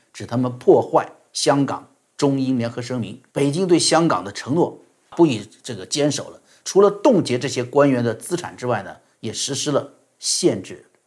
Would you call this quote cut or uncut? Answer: cut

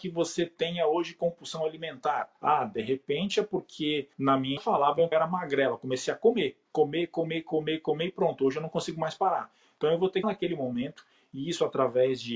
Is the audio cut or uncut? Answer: cut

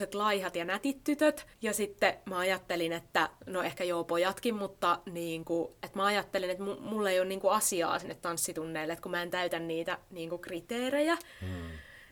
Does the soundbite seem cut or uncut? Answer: cut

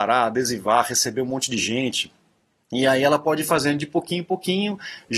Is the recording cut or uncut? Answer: uncut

